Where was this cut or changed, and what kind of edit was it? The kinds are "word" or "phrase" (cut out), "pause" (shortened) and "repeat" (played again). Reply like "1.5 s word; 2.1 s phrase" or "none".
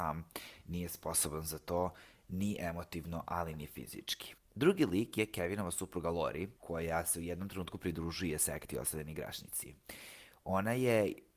4.4 s pause; 6.6 s pause